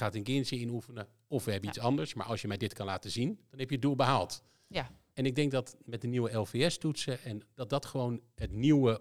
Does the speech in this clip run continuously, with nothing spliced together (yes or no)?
yes